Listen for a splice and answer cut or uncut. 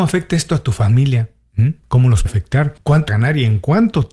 cut